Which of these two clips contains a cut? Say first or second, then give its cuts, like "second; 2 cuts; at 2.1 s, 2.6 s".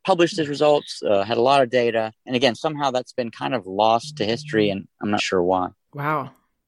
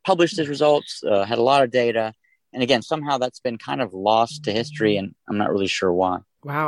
first; 2 cuts; at 2.2 s, 5.2 s